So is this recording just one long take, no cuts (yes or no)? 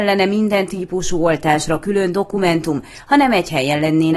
yes